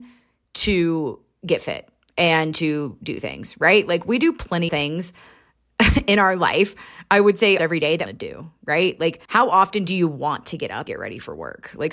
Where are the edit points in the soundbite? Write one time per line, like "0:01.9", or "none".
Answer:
0:04.7
0:07.6
0:08.1
0:09.2
0:10.9

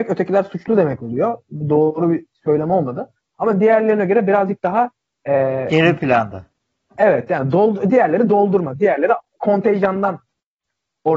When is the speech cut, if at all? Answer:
none

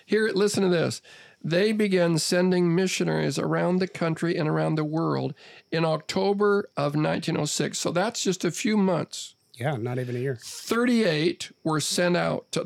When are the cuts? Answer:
none

